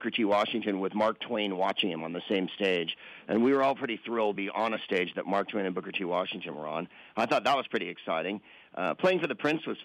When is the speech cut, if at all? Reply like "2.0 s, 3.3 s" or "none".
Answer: 4.4 s